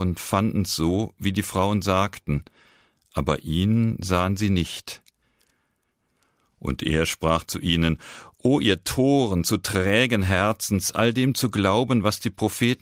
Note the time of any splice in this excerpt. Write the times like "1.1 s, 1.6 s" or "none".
none